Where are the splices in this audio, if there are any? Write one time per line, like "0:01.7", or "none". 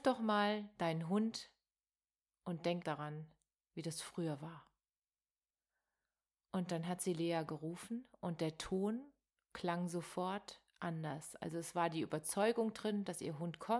0:02.8